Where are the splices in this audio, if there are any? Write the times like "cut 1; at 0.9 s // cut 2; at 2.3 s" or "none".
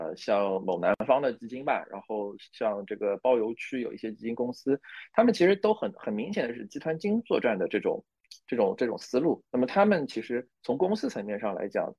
cut 1; at 9.5 s